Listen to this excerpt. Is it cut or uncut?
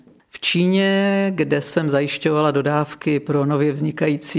uncut